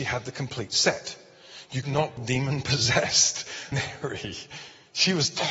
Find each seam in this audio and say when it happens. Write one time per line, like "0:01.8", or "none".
0:01.8
0:02.2
0:03.7